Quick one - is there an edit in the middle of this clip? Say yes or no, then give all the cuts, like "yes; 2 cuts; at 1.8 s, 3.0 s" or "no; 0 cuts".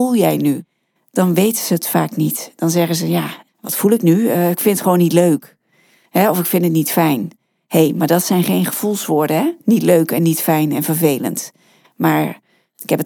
yes; 2 cuts; at 3.5 s, 9.6 s